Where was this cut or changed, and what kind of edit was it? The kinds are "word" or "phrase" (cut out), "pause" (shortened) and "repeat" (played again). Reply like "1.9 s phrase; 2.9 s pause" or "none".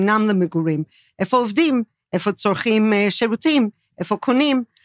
none